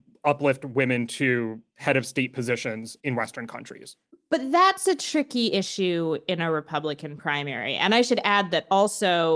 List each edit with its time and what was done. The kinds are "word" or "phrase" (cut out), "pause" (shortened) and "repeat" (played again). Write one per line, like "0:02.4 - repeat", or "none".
0:04.1 - pause